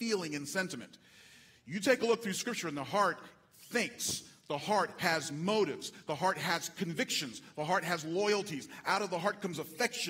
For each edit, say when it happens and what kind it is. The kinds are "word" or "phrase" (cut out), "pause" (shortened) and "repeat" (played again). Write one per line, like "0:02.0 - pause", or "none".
none